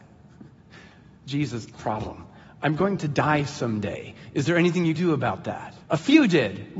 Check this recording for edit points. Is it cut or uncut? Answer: cut